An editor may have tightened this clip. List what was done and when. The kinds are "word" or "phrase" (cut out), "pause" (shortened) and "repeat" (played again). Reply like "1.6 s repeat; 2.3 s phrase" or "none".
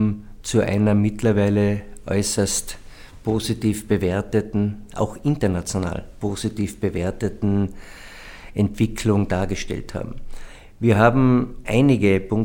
none